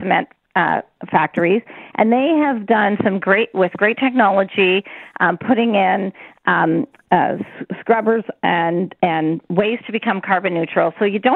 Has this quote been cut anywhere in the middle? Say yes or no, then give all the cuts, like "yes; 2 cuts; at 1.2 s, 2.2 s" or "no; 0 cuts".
no; 0 cuts